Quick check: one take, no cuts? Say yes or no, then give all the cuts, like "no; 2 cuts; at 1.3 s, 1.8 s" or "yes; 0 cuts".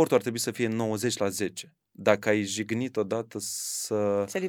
no; 1 cut; at 1.8 s